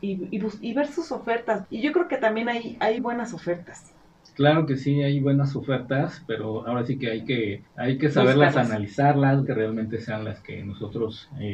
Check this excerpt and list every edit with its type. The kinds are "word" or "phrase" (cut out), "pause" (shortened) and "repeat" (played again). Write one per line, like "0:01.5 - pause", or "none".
0:01.6 - phrase
0:03.0 - word
0:07.7 - pause
0:09.5 - phrase